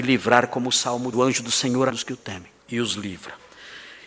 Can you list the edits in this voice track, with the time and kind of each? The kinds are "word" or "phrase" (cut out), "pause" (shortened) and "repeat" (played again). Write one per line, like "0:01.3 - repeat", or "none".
0:01.1 - word
0:01.9 - phrase
0:02.6 - pause